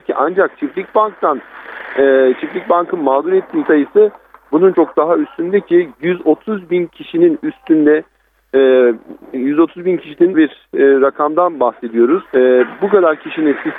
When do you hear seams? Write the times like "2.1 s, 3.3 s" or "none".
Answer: 3.6 s, 4.7 s, 10.3 s, 12.3 s